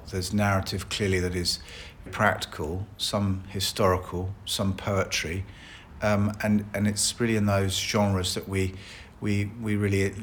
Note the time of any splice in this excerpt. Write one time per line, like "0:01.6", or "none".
0:02.1